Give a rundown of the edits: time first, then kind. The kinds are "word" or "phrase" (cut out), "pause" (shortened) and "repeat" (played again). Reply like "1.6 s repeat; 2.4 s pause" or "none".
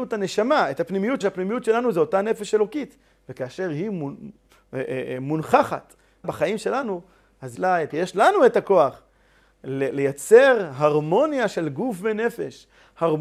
1.2 s word; 6.2 s word; 7.5 s word; 7.9 s word